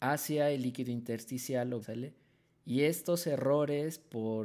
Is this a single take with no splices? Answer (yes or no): no